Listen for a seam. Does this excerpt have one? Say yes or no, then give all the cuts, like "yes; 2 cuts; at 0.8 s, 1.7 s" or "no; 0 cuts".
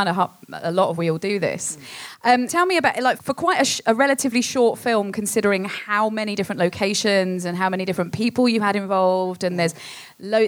yes; 3 cuts; at 1.0 s, 2.5 s, 3.2 s